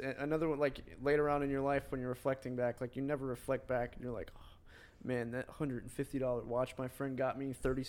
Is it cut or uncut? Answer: uncut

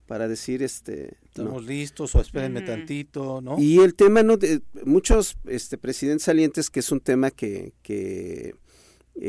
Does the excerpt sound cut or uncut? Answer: uncut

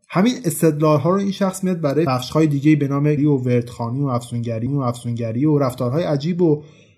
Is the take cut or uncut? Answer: cut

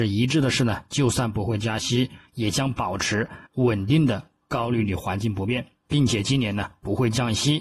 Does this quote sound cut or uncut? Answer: cut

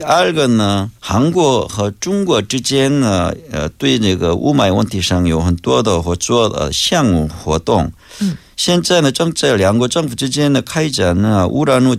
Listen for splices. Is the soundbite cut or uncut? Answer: cut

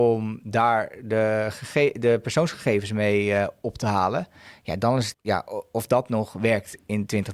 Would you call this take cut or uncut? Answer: cut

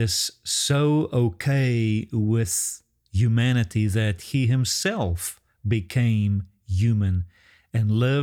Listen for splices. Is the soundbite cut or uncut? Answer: uncut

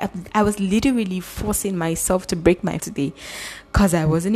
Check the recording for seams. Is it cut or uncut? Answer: cut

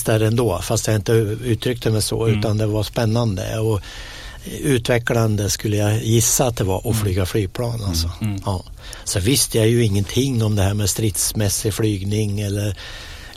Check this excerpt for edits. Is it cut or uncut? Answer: uncut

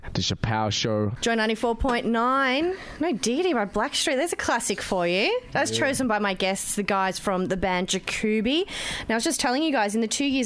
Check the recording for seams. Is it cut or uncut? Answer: uncut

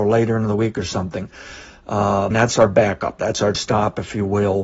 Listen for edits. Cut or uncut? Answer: cut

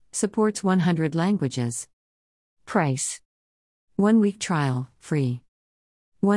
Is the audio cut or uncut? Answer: uncut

